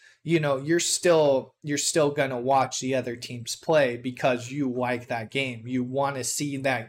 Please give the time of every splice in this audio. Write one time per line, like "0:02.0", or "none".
none